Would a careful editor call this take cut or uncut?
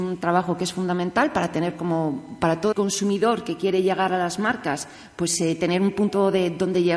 cut